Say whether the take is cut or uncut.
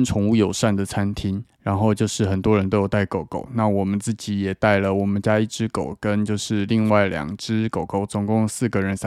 uncut